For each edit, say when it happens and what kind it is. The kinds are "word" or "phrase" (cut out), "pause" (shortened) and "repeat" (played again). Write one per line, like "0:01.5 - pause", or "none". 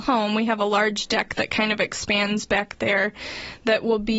none